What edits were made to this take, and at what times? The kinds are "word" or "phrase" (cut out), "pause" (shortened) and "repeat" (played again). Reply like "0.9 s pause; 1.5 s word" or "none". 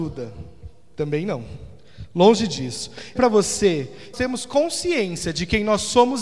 3.2 s phrase; 4.1 s phrase

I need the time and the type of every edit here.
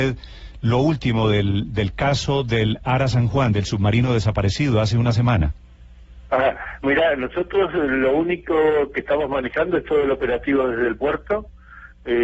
6.8 s word

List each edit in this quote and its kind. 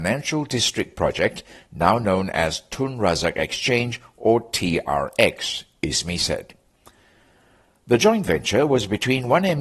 none

